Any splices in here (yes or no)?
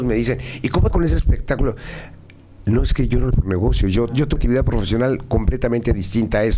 yes